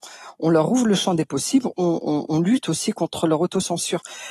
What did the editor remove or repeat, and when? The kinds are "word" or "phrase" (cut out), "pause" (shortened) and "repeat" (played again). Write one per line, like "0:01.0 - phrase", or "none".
none